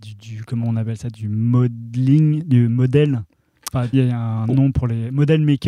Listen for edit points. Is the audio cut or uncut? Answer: cut